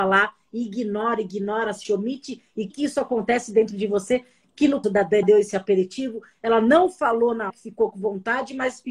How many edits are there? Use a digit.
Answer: 5